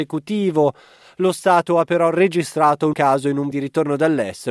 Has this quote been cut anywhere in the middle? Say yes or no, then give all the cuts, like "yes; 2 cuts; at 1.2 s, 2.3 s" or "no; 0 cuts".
yes; 2 cuts; at 2.9 s, 3.5 s